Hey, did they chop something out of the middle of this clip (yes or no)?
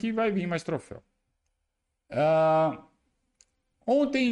yes